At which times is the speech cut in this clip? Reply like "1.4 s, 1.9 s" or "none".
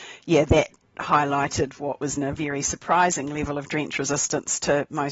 2.2 s

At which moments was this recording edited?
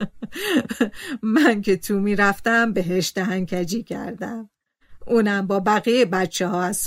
none

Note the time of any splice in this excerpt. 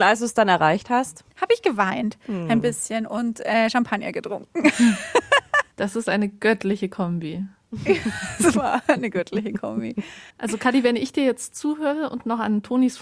1.3 s, 5.7 s, 10.3 s

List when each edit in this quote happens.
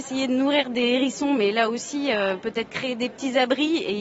none

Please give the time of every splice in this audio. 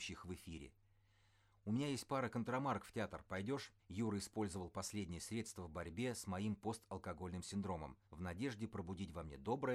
3.8 s, 8.0 s

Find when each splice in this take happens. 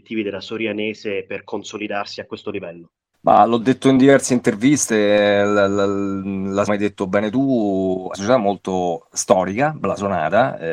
3.1 s, 6.7 s, 8.1 s

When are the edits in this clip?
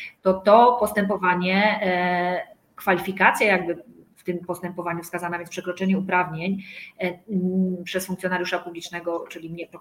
none

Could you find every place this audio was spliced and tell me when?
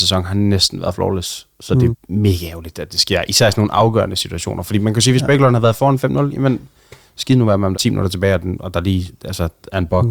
1.9 s, 7.7 s

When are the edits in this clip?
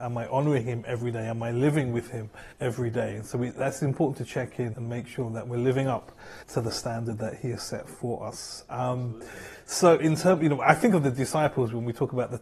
2.5 s, 4.7 s, 6.4 s, 10.0 s

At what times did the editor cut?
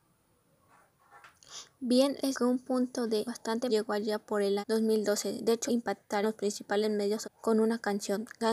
2.3 s, 3.3 s, 3.7 s, 4.6 s, 5.7 s, 6.2 s, 7.2 s

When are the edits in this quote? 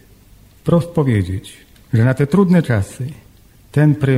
none

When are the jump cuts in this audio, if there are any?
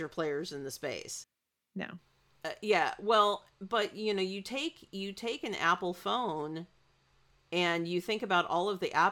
none

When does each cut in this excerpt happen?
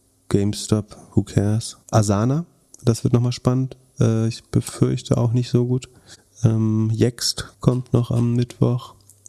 1.8 s, 7.5 s

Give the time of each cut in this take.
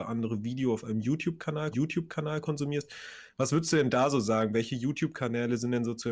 1.7 s

